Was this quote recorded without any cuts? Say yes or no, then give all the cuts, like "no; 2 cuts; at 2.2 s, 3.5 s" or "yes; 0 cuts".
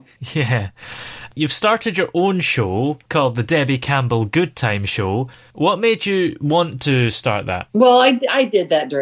yes; 0 cuts